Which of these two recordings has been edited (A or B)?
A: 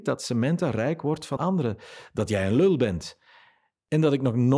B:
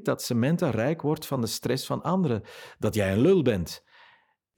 A